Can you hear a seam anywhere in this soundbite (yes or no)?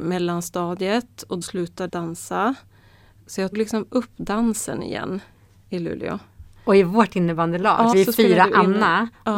yes